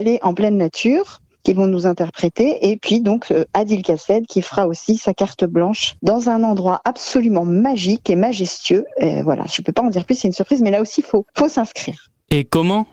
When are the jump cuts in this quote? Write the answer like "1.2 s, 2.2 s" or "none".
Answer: 6.0 s, 11.3 s